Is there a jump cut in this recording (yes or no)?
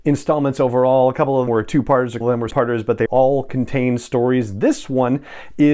yes